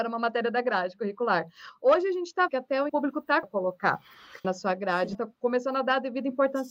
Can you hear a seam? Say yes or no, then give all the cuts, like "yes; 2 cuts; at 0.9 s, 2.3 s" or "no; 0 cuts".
yes; 5 cuts; at 2.5 s, 2.9 s, 3.4 s, 4.4 s, 5.1 s